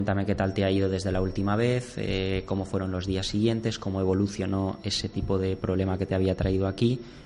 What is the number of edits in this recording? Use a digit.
0